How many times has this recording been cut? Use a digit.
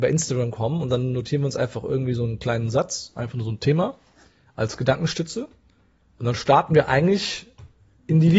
0